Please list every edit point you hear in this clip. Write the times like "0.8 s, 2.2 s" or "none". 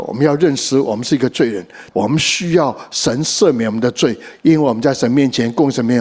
1.9 s